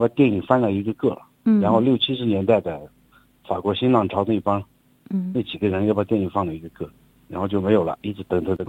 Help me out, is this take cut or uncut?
uncut